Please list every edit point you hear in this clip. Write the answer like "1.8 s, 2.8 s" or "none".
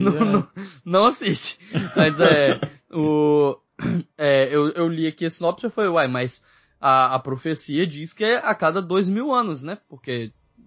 4.1 s